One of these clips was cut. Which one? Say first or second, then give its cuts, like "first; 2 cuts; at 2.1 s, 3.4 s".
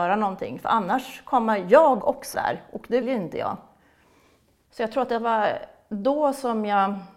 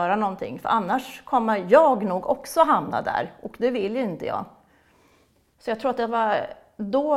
first; 3 cuts; at 2.0 s, 2.3 s, 3.0 s